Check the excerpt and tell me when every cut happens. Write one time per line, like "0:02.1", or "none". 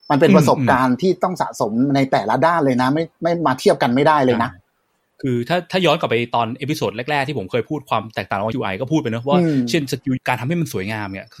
0:08.5
0:10.2